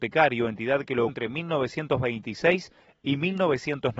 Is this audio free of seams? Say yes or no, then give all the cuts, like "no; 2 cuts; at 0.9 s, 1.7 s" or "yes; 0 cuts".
no; 1 cut; at 1.1 s